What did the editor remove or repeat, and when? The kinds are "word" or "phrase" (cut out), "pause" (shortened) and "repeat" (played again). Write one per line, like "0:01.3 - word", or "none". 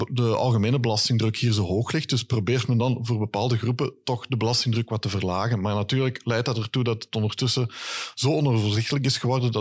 none